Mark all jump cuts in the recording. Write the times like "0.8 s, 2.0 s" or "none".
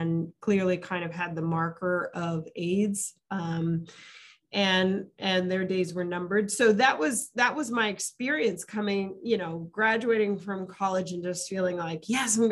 none

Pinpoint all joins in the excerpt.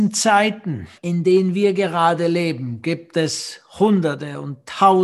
1.0 s

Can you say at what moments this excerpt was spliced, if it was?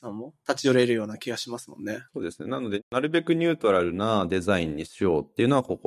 2.1 s

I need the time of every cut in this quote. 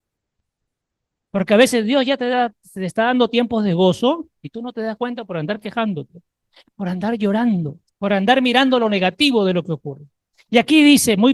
4.4 s, 7.9 s

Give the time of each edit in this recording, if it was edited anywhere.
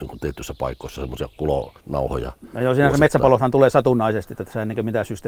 1.8 s

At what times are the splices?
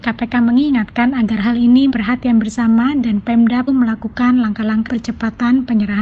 1.9 s, 3.7 s, 4.9 s

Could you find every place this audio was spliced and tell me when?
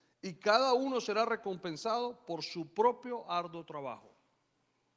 none

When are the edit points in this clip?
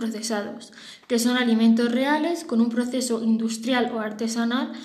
none

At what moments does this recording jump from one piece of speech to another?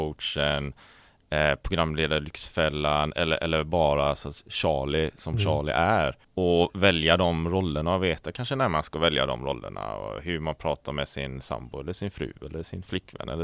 6.2 s

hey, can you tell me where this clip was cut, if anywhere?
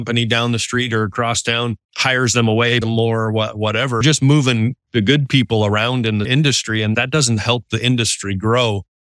1.8 s, 2.8 s, 4.0 s, 6.2 s

